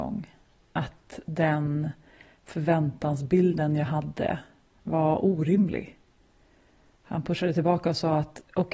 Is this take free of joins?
yes; 0 cuts

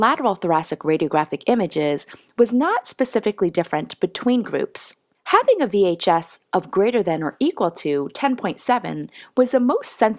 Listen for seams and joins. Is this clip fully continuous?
yes; 0 cuts

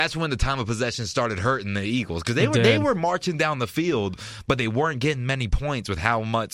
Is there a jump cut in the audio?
no; 0 cuts

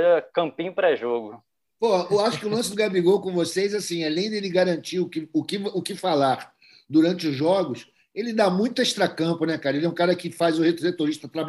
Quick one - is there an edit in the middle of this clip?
no; 0 cuts

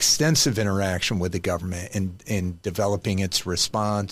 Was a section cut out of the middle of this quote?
no; 0 cuts

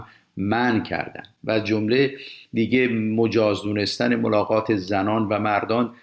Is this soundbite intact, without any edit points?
yes; 0 cuts

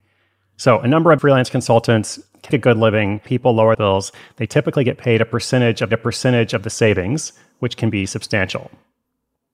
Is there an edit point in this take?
yes; 5 cuts; at 1.2 s, 2.5 s, 3.3 s, 3.7 s, 5.9 s

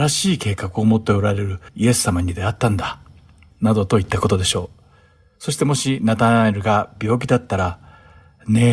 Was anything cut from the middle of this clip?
yes; 1 cut; at 1.7 s

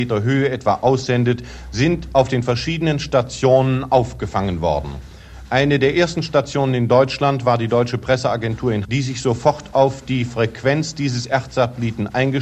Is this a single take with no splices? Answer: no; 1 cut; at 8.8 s

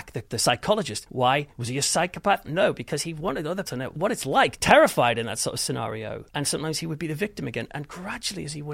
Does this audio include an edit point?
yes; 2 cuts; at 3.7 s, 4.6 s

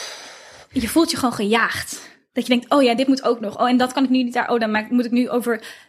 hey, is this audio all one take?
yes; 0 cuts

